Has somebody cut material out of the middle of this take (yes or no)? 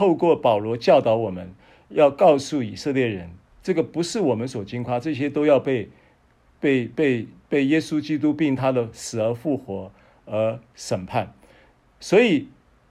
yes